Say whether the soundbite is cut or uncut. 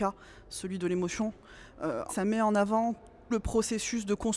cut